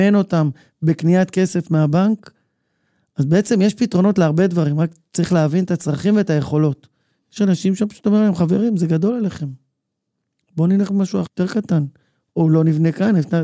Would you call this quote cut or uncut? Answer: cut